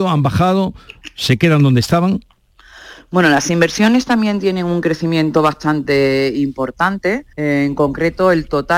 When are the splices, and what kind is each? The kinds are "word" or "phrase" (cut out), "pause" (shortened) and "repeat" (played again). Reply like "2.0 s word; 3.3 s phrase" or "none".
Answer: 7.3 s pause